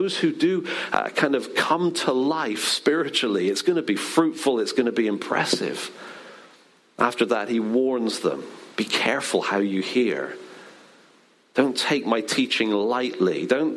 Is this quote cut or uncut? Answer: uncut